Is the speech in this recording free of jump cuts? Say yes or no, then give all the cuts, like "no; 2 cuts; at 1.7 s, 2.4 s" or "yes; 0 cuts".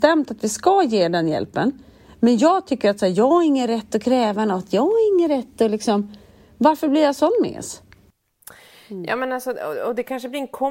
yes; 0 cuts